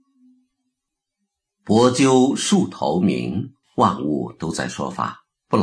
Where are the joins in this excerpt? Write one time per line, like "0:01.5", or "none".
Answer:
0:03.6